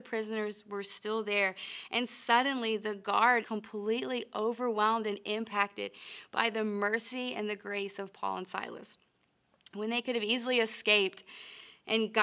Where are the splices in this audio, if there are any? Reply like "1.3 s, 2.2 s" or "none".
3.4 s